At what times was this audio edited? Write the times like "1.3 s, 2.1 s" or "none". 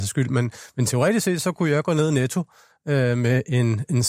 none